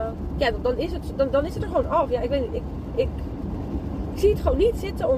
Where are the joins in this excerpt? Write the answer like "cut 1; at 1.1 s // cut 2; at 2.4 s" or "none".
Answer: none